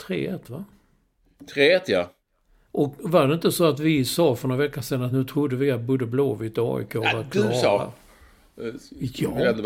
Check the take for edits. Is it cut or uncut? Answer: uncut